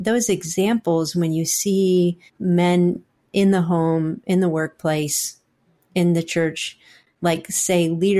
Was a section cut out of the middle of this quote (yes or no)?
yes